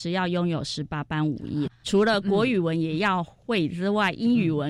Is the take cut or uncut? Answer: uncut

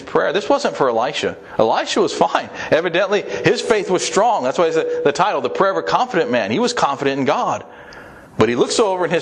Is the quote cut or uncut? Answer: cut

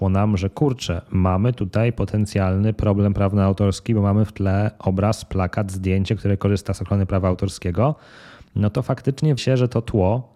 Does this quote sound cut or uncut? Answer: cut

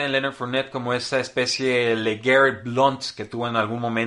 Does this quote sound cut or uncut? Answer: uncut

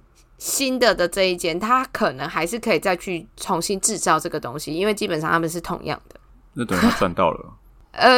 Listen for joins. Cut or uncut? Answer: cut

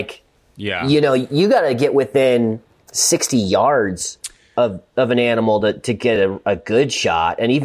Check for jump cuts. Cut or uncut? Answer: uncut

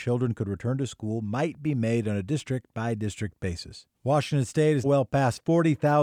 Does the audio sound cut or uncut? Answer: cut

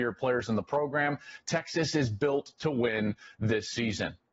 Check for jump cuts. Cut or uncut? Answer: uncut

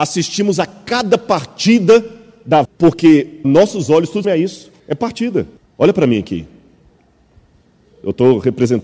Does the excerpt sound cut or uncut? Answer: cut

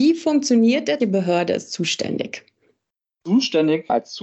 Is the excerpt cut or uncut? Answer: cut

